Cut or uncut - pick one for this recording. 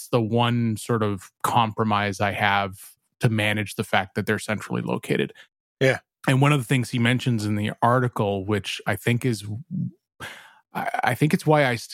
uncut